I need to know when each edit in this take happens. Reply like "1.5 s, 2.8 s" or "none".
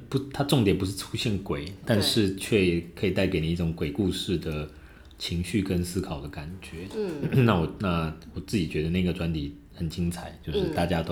9.7 s